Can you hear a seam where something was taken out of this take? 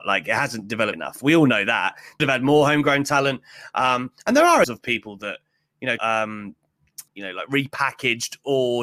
yes; 5 cuts; at 0.9 s, 2.2 s, 4.6 s, 6.0 s, 7.1 s

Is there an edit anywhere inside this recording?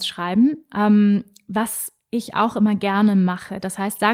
no; 0 cuts

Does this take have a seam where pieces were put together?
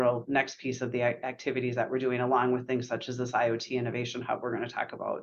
no; 0 cuts

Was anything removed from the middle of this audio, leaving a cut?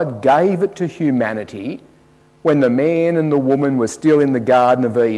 no; 0 cuts

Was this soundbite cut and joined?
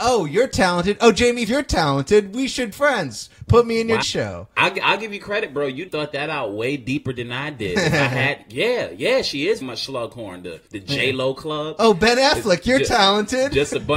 yes; 6 cuts; at 1.5 s, 2.7 s, 4.0 s, 5.9 s, 9.6 s, 10.7 s

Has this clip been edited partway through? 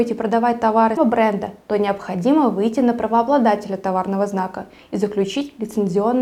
yes; 1 cut; at 1.0 s

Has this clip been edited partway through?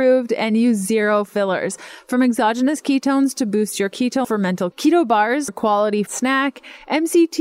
yes; 4 cuts; at 4.2 s, 4.7 s, 5.5 s, 6.1 s

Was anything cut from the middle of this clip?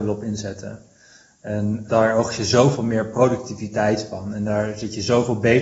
yes; 1 cut; at 1.9 s

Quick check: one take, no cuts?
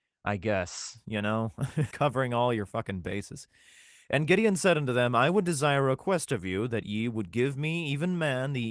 no; 1 cut; at 1.9 s

